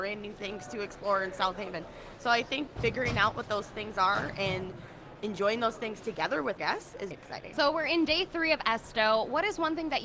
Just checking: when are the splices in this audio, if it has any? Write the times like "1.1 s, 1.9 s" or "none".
2.7 s, 6.6 s, 7.1 s